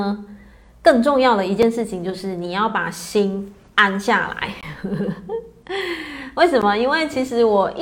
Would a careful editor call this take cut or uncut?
uncut